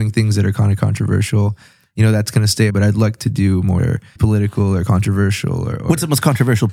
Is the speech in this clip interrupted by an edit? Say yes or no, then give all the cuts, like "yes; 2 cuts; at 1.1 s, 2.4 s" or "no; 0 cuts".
yes; 3 cuts; at 2.7 s, 3.8 s, 4.2 s